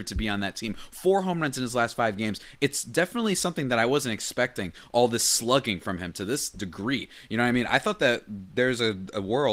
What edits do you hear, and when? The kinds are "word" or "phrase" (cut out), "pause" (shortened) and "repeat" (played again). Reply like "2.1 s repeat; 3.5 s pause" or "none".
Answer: none